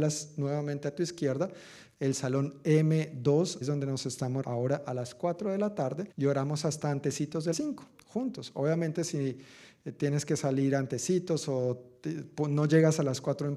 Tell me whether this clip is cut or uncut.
cut